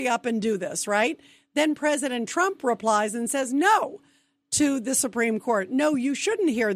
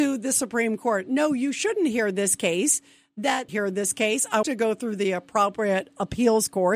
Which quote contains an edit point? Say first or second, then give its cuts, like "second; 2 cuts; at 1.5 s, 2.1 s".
second; 2 cuts; at 3.5 s, 4.4 s